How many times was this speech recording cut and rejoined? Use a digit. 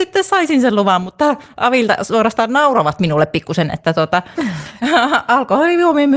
0